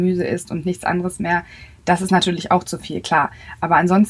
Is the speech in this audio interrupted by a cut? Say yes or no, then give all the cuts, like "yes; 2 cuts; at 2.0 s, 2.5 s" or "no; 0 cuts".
no; 0 cuts